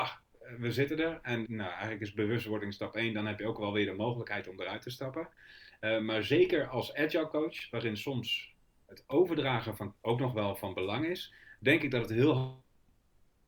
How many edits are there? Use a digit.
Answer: 2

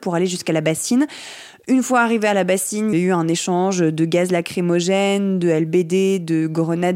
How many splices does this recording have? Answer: 1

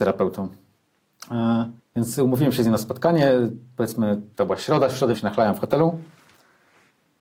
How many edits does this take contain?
3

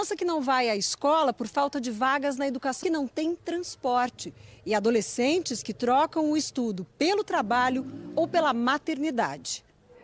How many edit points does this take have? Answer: 1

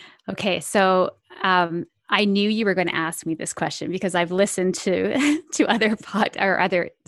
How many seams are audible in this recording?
0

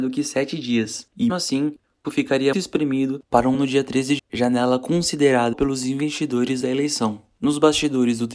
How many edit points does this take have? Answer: 7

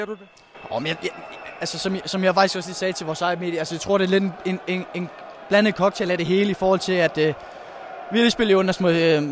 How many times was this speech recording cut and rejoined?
0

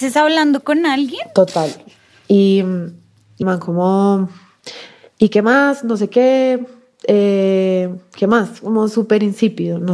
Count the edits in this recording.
1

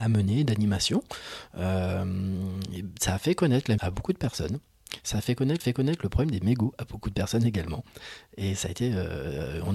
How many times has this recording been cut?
2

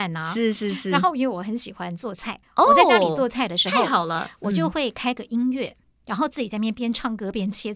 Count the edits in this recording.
0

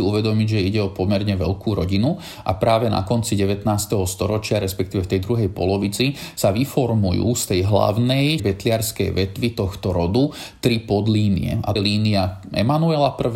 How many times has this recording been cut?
2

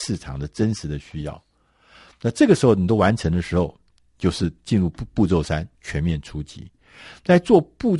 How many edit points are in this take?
0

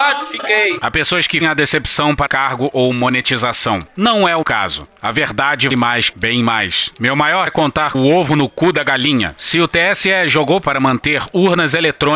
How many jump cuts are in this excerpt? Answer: 8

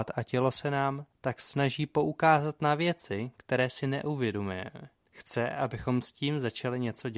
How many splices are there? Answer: 1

